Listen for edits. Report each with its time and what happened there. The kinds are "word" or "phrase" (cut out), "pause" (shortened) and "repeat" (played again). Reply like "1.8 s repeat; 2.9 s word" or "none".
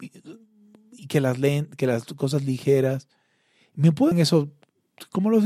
4.1 s word